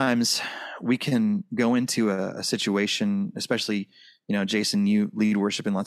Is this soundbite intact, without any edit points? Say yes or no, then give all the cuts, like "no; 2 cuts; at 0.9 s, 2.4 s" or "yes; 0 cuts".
yes; 0 cuts